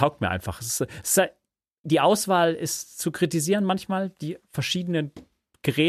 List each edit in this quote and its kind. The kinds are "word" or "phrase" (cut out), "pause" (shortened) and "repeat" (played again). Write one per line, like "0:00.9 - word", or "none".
0:01.8 - word